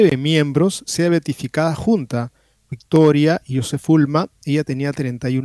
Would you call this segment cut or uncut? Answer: uncut